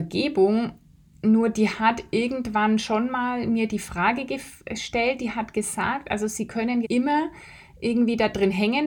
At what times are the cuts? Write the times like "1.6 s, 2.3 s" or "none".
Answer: 6.8 s